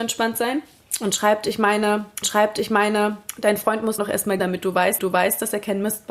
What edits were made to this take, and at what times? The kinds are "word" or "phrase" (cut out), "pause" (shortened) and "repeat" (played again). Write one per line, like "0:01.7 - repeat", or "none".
0:02.2 - repeat
0:04.0 - phrase
0:04.4 - word
0:05.0 - repeat